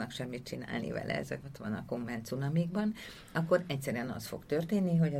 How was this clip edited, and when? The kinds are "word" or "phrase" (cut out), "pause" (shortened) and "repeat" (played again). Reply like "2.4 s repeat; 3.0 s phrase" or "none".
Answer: none